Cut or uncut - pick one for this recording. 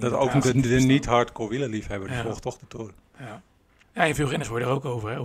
uncut